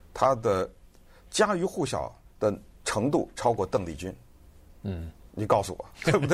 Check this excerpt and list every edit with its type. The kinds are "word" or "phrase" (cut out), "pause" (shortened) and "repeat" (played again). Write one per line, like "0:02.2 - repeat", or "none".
0:02.3 - pause

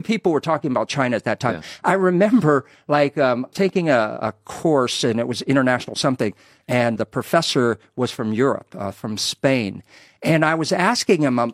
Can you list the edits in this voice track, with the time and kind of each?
0:03.5 - phrase
0:07.0 - word

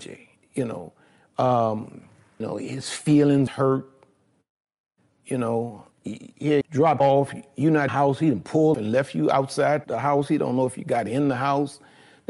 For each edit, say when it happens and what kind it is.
0:02.4 - word
0:03.5 - word
0:05.9 - pause
0:06.6 - word
0:07.0 - word
0:07.9 - phrase
0:08.7 - word
0:09.8 - word

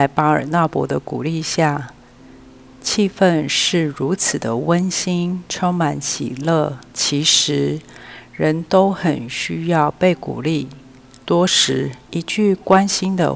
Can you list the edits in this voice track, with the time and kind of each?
0:06.9 - pause
0:11.2 - pause
0:12.0 - pause

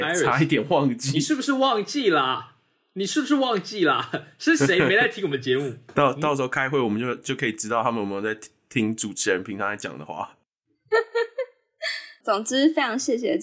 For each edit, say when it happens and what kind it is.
0:12.2 - phrase

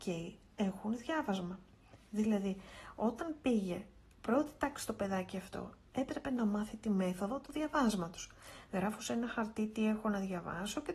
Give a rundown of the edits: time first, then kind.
none

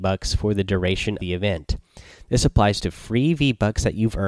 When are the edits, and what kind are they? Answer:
0:01.2 - word

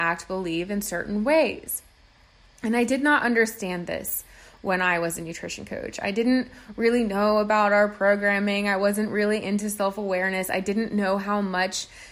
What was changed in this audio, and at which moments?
none

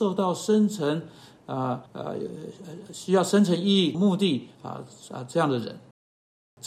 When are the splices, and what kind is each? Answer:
0:01.9 - pause
0:03.9 - phrase
0:04.5 - pause

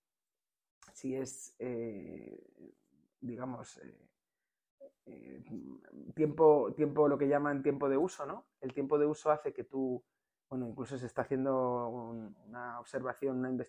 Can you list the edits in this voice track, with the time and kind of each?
none

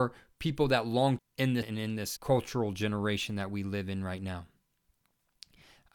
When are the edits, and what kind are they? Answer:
0:01.2 - phrase
0:01.6 - word
0:02.2 - word

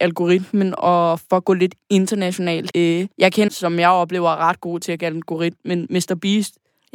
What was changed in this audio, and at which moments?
0:02.7 - word
0:03.1 - pause
0:03.5 - phrase
0:05.0 - word

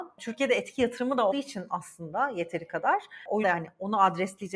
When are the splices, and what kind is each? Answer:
0:01.3 - word
0:03.4 - word

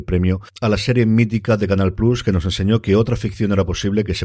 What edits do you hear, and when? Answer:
none

